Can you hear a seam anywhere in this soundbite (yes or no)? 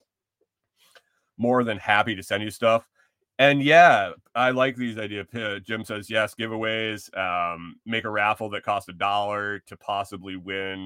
no